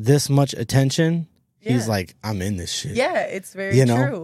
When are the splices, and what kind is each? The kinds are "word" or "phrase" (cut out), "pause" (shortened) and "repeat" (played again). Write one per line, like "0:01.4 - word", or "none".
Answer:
none